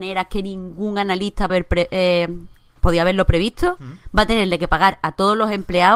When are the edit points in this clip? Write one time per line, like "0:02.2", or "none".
0:01.5